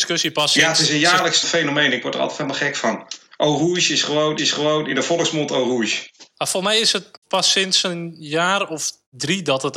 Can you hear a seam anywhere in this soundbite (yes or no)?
yes